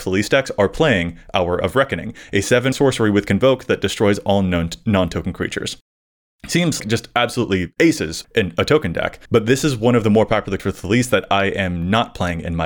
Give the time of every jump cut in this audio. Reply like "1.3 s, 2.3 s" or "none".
2.7 s, 6.8 s, 8.2 s, 9.3 s, 10.6 s